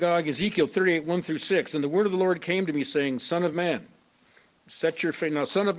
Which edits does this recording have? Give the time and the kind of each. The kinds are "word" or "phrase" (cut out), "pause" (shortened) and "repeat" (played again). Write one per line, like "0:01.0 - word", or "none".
none